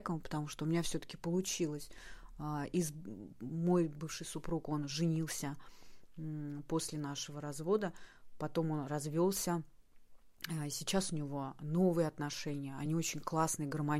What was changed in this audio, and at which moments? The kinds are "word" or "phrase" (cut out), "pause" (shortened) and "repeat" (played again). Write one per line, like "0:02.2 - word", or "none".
none